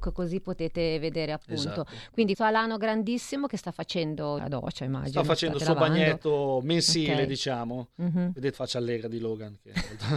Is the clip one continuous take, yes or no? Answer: no